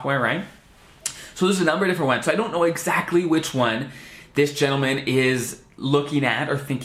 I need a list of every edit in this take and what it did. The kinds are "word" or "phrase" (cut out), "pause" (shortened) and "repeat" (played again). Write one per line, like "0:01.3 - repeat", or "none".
none

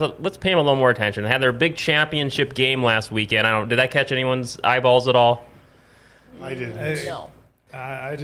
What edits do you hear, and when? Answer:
none

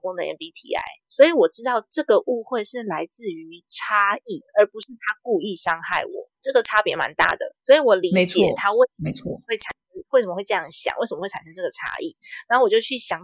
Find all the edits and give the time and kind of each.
0:01.0 - pause
0:04.5 - pause
0:06.3 - pause
0:07.6 - pause

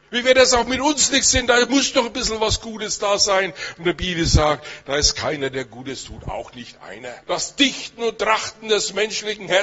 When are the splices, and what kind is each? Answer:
0:07.2 - pause

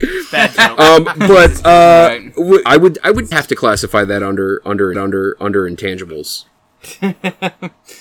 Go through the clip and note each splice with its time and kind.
0:01.1 - word
0:02.7 - word
0:03.3 - word
0:04.9 - repeat

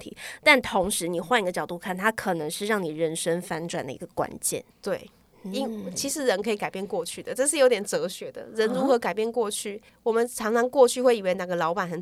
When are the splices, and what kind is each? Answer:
0:04.7 - pause
0:09.9 - pause

